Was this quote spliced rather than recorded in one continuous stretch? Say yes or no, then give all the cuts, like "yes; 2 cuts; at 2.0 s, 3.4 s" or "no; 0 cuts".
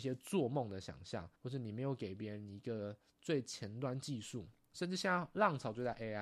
yes; 1 cut; at 1.4 s